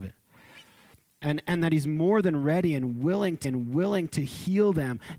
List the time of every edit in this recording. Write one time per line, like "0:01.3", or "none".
0:03.4